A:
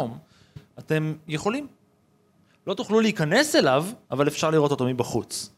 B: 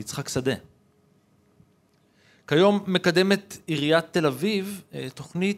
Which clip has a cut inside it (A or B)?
A